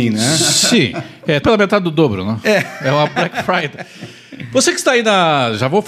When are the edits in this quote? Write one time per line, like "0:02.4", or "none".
0:01.4